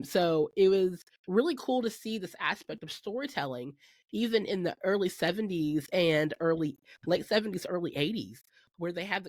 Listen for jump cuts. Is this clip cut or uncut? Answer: uncut